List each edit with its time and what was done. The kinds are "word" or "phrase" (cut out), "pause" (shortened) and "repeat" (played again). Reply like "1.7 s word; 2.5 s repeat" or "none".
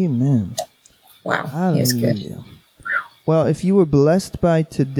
none